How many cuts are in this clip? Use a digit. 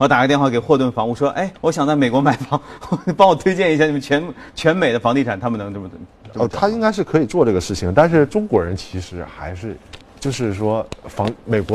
2